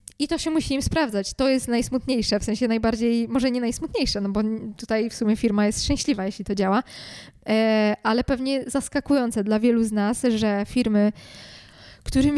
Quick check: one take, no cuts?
yes; 0 cuts

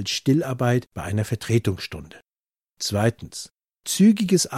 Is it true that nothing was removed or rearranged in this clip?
yes; 0 cuts

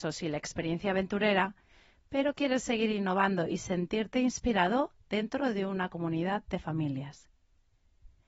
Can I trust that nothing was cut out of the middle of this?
yes; 0 cuts

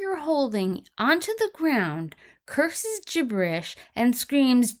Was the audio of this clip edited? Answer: no; 0 cuts

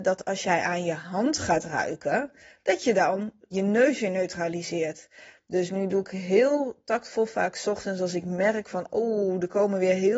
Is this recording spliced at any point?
yes; 1 cut; at 3.5 s

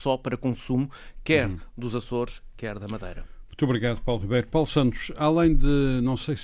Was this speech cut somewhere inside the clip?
no; 0 cuts

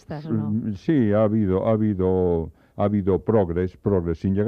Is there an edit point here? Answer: no; 0 cuts

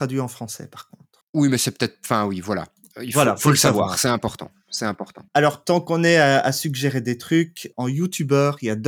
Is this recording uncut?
no; 1 cut; at 5.3 s

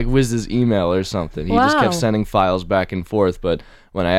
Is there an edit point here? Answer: no; 0 cuts

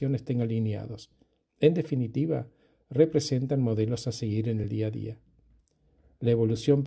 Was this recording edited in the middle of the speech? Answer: no; 0 cuts

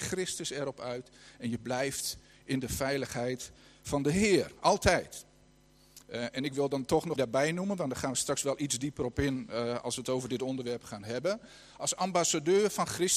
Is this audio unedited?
no; 2 cuts; at 6.0 s, 7.2 s

